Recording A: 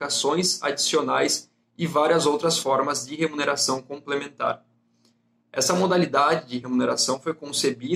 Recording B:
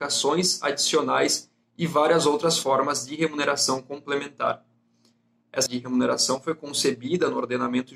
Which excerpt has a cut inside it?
B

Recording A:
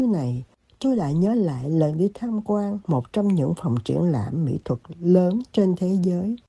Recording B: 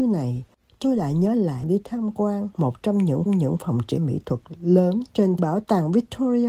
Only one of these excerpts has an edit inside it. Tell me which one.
B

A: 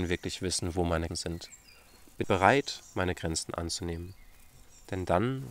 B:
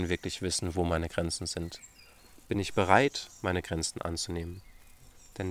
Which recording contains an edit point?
A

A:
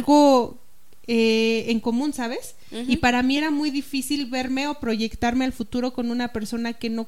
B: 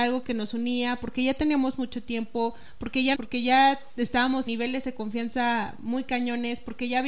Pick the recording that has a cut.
B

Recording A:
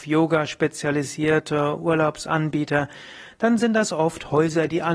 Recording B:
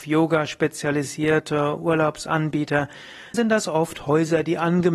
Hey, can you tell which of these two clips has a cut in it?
B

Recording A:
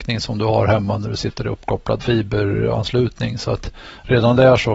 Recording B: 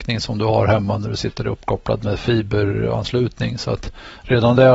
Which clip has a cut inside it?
A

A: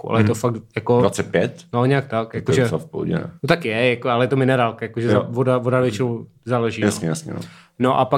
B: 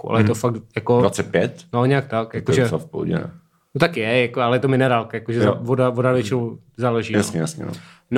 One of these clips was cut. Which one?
A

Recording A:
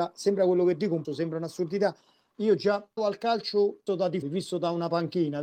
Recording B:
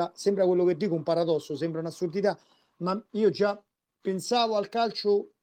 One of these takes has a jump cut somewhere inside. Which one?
A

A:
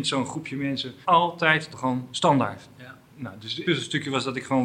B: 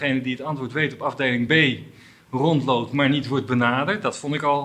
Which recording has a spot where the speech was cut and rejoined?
A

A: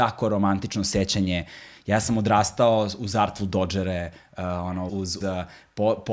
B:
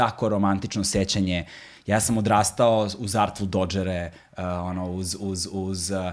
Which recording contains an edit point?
A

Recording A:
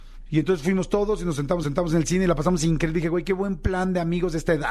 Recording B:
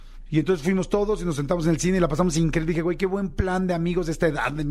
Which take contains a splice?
A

